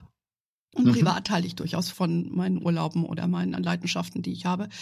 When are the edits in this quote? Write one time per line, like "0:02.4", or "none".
0:01.9
0:03.6